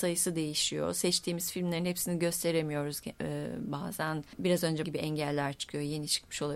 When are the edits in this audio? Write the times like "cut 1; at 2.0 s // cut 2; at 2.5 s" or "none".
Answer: cut 1; at 4.3 s // cut 2; at 4.8 s